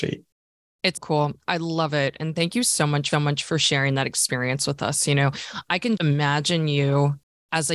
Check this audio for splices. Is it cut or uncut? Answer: cut